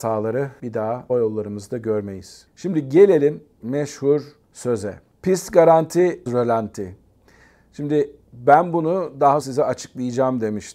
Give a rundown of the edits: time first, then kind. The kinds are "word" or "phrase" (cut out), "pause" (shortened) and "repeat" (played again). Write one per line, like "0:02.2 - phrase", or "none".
0:01.1 - word
0:03.6 - word
0:06.3 - phrase
0:08.2 - pause
0:09.4 - word